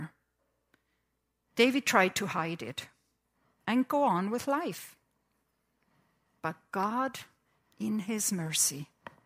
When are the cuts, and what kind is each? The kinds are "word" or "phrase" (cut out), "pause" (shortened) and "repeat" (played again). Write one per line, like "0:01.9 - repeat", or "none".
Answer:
none